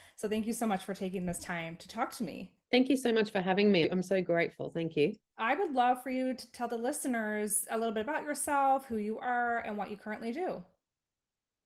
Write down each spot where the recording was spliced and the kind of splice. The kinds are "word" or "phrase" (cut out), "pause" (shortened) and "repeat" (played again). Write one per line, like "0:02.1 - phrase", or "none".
0:02.6 - pause